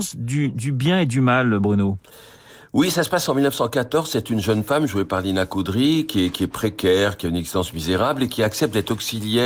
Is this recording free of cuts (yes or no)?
yes